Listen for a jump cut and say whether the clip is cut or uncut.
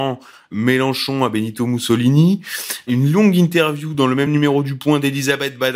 uncut